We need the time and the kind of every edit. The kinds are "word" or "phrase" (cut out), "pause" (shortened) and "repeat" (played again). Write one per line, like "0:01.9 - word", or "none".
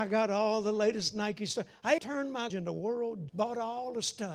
0:02.0 - word
0:02.5 - word
0:03.3 - word

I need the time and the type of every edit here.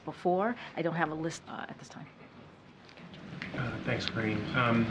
0:01.4 - phrase

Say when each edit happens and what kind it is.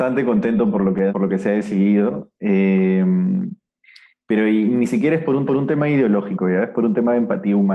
0:01.1 - word
0:05.5 - repeat

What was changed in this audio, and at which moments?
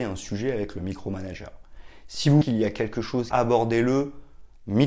0:02.4 - word
0:03.3 - phrase

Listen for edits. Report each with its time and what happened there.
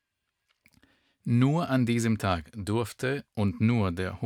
none

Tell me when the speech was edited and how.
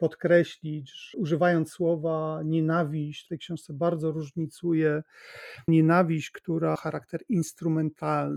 0:01.1 - word
0:03.3 - word
0:05.7 - word
0:06.8 - word

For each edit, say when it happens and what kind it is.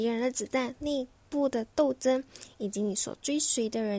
none

